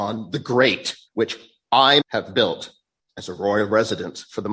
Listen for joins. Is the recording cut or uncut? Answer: cut